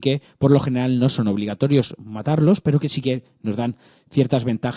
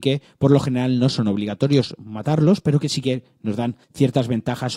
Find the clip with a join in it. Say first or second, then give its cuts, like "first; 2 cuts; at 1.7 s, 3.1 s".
second; 1 cut; at 3.8 s